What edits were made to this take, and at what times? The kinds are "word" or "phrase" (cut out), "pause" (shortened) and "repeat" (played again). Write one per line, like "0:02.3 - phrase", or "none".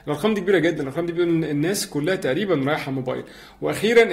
none